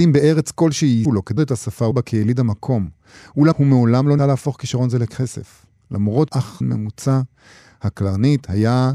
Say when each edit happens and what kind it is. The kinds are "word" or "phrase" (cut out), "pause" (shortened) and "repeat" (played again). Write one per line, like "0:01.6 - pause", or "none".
0:01.0 - word
0:01.4 - word
0:01.9 - word
0:03.5 - word
0:04.2 - word
0:06.3 - word
0:06.6 - word